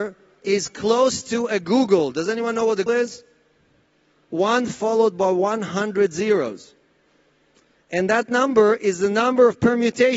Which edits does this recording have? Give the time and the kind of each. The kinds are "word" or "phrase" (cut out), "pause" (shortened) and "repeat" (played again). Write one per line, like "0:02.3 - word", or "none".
0:02.9 - word